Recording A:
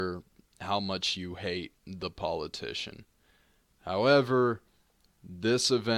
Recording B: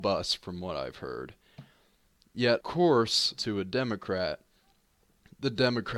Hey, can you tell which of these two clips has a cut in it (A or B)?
B